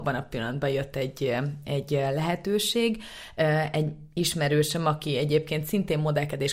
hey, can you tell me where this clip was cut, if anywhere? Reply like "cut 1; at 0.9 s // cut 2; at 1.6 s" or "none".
none